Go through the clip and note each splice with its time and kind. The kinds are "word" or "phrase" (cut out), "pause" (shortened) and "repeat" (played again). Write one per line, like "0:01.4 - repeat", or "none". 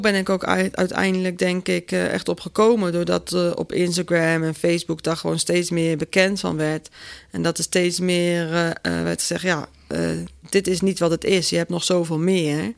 none